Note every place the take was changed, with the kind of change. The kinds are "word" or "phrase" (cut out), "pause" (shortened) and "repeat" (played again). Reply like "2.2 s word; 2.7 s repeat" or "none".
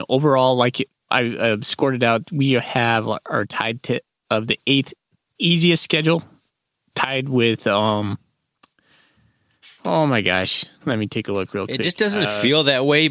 1.1 s word; 5.1 s pause